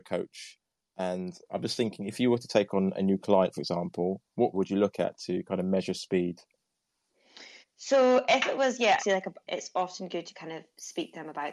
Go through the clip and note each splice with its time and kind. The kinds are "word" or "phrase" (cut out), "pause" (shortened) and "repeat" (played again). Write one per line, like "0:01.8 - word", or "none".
0:04.5 - word
0:07.6 - pause
0:09.0 - phrase
0:09.4 - phrase